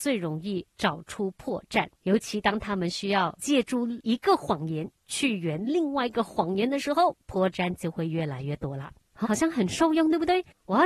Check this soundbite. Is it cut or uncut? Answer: cut